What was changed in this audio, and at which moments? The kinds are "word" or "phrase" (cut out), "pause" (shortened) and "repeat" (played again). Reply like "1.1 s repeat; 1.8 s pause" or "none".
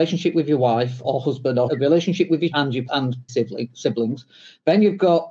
1.0 s word; 1.7 s word; 2.5 s word; 2.9 s word; 3.3 s word

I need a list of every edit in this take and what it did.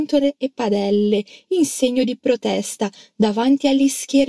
none

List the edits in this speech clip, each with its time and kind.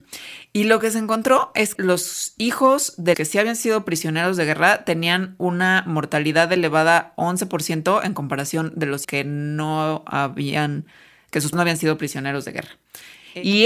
1.8 s word; 3.1 s word; 9.0 s word; 11.5 s word

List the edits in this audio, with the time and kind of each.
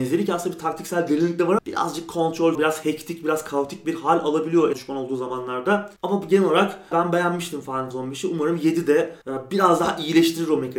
1.6 s word; 2.5 s word; 4.7 s phrase; 6.0 s pause; 6.9 s word; 7.9 s word; 9.2 s pause

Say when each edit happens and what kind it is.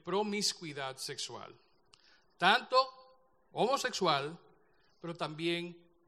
none

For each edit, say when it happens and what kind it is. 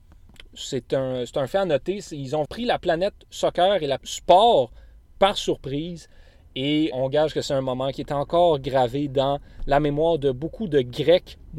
2.5 s word; 4.0 s word; 6.9 s word

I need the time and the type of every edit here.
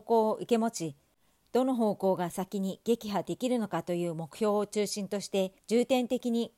5.6 s pause

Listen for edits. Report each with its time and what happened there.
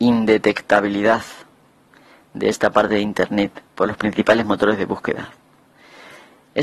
none

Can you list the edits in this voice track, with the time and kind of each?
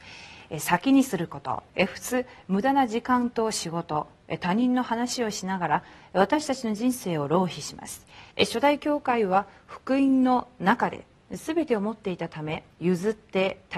1.7 s pause; 8.3 s pause; 12.7 s pause

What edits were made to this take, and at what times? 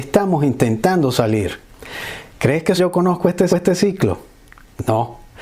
2.8 s word; 3.5 s repeat

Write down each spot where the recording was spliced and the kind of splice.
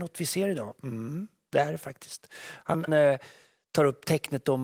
2.9 s word

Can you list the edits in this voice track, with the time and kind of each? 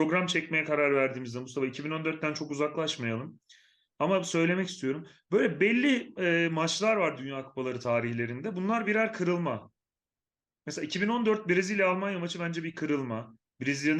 none

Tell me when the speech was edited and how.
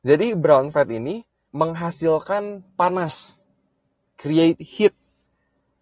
1.5 s word

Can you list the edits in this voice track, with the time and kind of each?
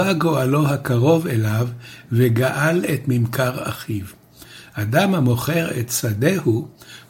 none

